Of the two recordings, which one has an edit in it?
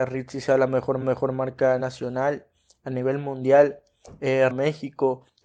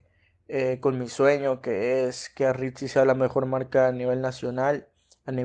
first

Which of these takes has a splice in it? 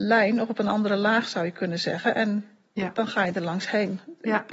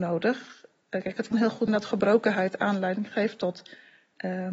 second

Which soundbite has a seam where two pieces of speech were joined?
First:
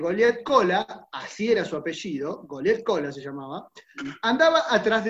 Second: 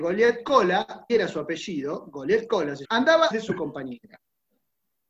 second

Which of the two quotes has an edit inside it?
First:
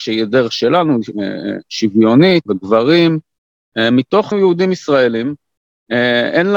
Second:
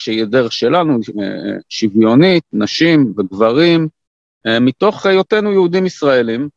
first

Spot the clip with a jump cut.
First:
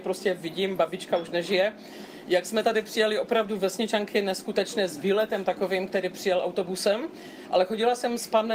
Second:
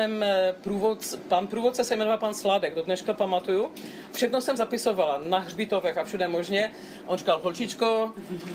second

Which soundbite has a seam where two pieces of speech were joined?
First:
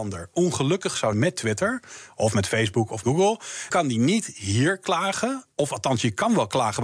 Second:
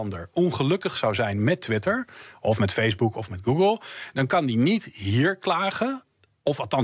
first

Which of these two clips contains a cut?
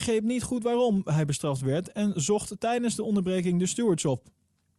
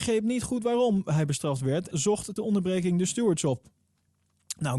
second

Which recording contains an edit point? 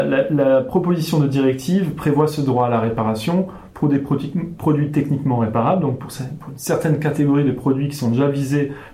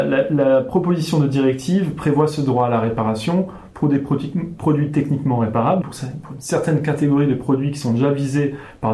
second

